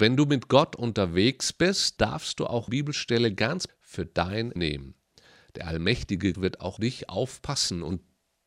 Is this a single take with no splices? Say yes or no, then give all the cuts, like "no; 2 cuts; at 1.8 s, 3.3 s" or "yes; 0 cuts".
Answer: no; 6 cuts; at 2.0 s, 2.7 s, 3.7 s, 4.6 s, 6.3 s, 6.8 s